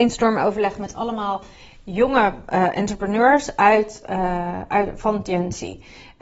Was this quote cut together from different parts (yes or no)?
no